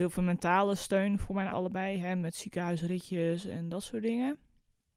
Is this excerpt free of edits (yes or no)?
no